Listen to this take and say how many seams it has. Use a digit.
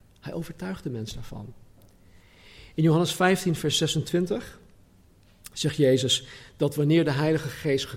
0